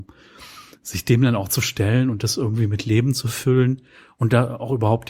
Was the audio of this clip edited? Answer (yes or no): no